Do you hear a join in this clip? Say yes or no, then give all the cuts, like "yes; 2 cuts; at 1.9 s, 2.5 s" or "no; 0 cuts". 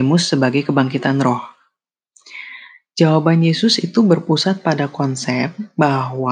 no; 0 cuts